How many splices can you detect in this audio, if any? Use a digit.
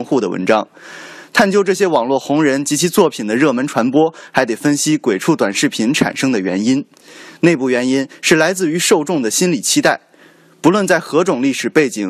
0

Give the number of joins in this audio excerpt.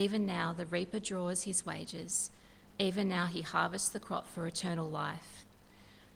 0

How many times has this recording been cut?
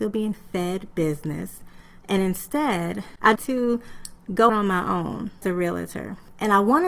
3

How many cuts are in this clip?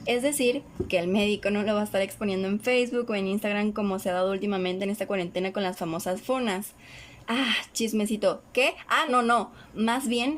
1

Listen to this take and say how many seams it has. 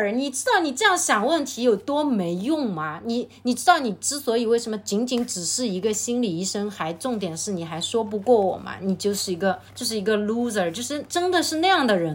1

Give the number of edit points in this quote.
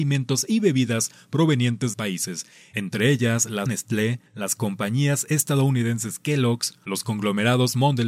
3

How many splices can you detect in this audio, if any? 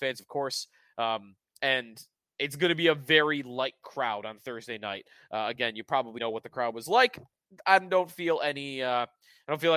1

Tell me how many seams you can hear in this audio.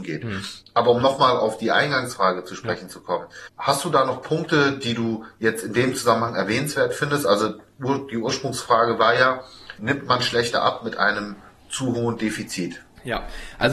1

